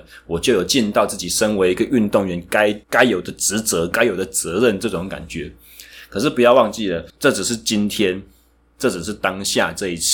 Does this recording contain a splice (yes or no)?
yes